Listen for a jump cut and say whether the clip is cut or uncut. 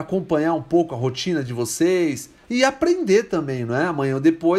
uncut